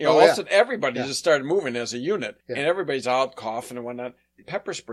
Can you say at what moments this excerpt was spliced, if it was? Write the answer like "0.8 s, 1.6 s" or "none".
2.4 s